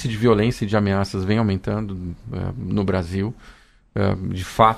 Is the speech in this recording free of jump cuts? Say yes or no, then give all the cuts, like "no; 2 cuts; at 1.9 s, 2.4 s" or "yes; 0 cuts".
yes; 0 cuts